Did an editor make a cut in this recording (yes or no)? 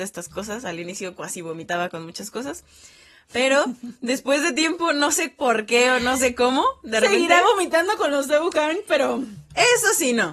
no